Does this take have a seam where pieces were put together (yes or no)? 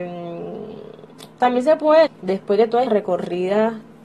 yes